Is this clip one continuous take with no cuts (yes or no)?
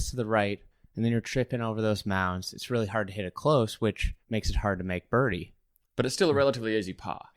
no